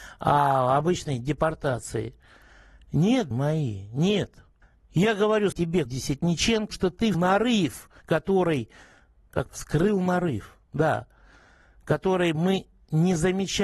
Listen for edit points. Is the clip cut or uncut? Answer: cut